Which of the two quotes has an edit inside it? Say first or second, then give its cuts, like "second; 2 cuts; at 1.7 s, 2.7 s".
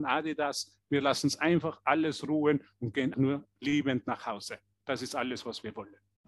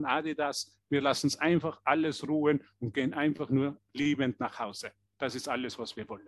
first; 1 cut; at 3.1 s